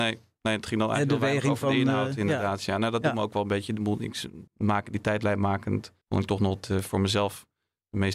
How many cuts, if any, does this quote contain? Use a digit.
2